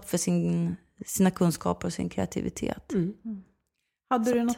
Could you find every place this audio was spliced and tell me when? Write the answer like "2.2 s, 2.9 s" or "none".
none